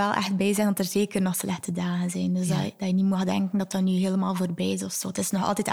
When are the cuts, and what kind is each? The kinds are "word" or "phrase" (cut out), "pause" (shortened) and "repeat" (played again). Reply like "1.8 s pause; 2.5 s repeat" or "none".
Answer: none